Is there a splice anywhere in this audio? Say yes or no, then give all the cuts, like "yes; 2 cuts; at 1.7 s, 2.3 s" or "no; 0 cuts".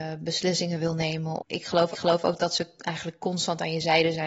yes; 2 cuts; at 1.4 s, 1.9 s